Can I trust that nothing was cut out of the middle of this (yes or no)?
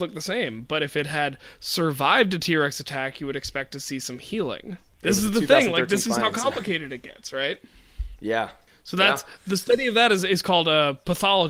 no